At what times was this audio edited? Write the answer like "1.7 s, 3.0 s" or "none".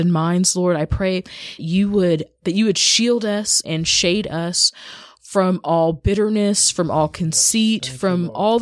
1.6 s, 2.4 s, 3.6 s